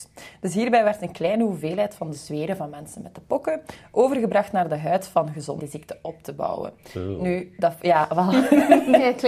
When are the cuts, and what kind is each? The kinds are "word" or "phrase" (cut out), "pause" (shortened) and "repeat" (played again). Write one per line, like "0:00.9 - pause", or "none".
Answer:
0:05.6 - phrase

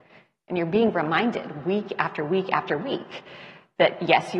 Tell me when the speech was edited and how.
none

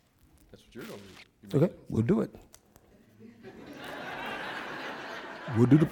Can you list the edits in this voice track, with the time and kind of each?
none

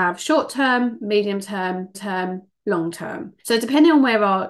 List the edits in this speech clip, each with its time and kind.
0:01.9 - repeat
0:03.4 - pause

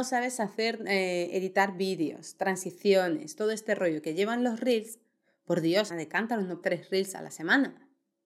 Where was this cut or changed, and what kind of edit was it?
0:05.9 - word
0:06.6 - word

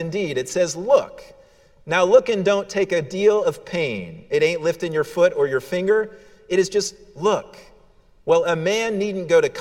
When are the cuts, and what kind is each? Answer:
none

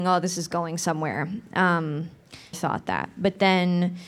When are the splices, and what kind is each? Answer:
0:02.5 - word

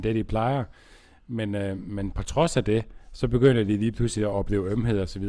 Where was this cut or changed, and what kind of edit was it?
none

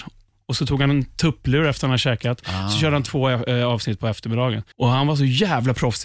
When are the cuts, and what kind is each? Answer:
0:04.7 - pause

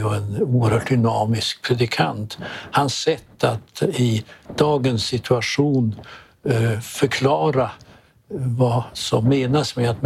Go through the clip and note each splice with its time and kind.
none

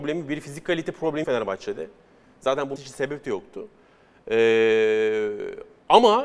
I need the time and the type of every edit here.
0:01.2 - word
0:02.8 - word

